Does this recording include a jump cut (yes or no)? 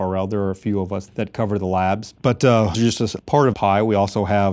yes